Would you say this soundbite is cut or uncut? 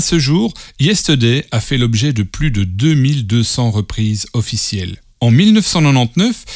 uncut